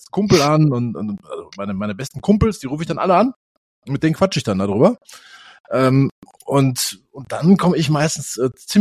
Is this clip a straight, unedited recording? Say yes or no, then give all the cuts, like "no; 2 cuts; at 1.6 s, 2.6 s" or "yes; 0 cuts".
yes; 0 cuts